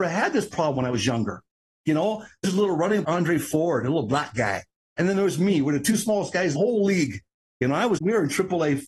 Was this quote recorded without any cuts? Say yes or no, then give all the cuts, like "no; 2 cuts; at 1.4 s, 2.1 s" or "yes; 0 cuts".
no; 4 cuts; at 2.4 s, 3.0 s, 6.5 s, 8.0 s